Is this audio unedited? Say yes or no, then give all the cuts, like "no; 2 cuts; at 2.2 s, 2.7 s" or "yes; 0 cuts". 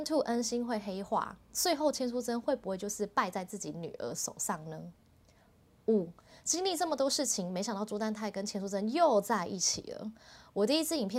yes; 0 cuts